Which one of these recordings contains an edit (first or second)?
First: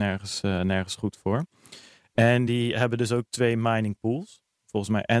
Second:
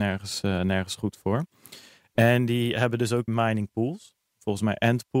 second